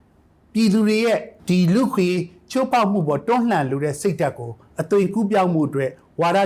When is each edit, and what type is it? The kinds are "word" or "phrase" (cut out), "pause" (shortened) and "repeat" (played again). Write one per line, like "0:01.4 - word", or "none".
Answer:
0:01.4 - pause